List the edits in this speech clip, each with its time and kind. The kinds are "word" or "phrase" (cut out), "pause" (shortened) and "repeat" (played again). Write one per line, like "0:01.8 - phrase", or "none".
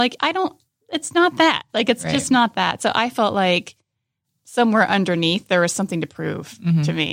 none

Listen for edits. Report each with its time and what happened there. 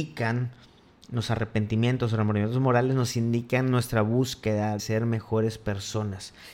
0:04.8 - word

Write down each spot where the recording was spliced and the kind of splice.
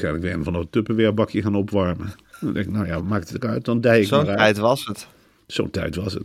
none

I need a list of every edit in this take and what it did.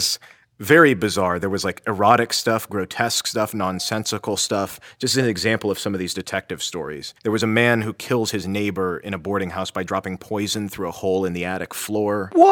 0:07.2 - pause

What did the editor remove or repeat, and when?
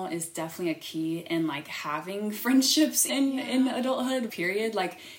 0:03.1 - word
0:04.3 - word

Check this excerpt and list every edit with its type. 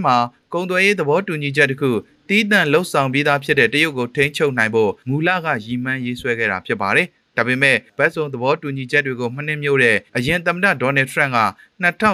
0:10.1 - pause

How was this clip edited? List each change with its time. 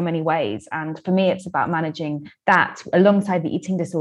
none

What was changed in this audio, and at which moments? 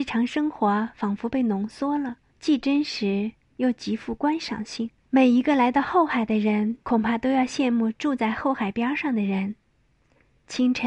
0:02.3 - pause
0:05.0 - pause
0:06.8 - pause

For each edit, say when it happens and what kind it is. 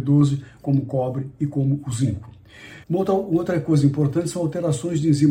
0:02.8 - pause

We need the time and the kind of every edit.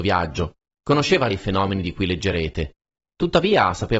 0:01.3 - word

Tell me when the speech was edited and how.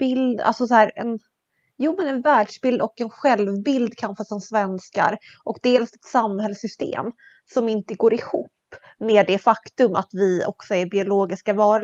none

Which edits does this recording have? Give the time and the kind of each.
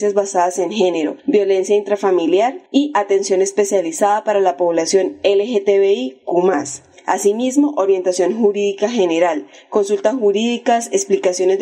0:01.2 - pause
0:02.7 - pause

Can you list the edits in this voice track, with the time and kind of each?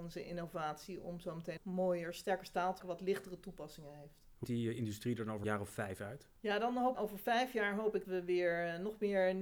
0:01.6 - word
0:02.8 - word
0:04.4 - word
0:05.4 - word
0:06.9 - word
0:08.0 - word

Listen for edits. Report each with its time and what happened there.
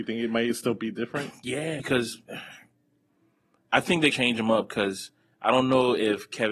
0:01.8 - phrase
0:04.1 - word

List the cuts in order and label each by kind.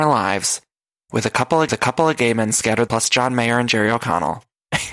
0:01.7 - repeat
0:02.9 - word

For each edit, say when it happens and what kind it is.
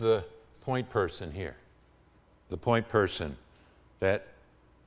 0:02.2 - pause

